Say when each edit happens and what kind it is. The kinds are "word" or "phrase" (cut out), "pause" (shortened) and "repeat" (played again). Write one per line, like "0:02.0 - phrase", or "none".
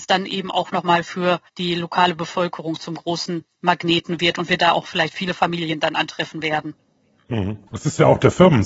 0:01.5 - pause
0:07.7 - pause